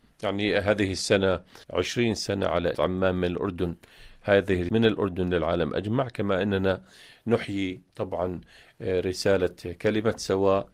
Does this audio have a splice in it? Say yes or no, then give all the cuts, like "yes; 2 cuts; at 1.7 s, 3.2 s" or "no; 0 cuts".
yes; 3 cuts; at 1.6 s, 2.7 s, 4.7 s